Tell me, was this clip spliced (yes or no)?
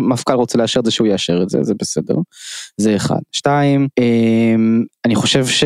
yes